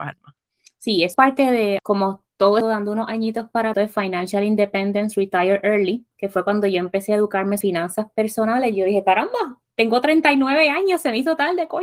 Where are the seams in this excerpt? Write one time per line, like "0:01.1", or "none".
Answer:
0:01.1
0:01.8
0:02.6
0:03.7
0:06.1
0:07.6
0:09.7